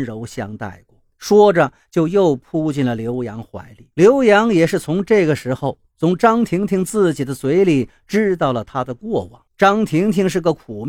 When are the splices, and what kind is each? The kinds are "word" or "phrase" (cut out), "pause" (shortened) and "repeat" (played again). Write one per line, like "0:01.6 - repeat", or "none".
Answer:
0:01.1 - pause
0:03.9 - pause
0:09.5 - pause